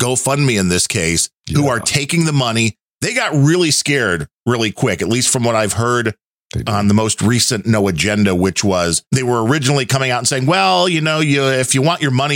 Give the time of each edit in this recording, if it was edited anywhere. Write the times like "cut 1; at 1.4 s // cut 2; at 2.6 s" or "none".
cut 1; at 1.4 s // cut 2; at 9.1 s

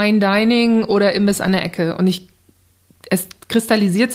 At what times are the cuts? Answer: none

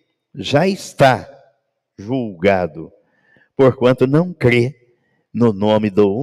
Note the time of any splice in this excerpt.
none

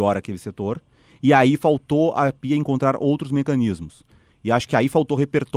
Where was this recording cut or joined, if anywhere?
none

